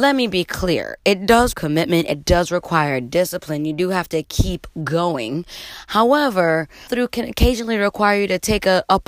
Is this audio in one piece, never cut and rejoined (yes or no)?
no